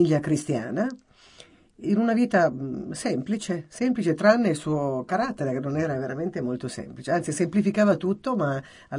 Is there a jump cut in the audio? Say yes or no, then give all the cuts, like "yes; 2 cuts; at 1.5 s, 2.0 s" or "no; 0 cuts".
no; 0 cuts